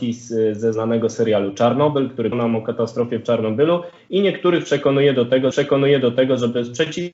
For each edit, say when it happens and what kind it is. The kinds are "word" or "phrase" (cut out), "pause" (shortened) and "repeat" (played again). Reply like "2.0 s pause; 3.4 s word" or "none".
2.3 s word; 5.5 s repeat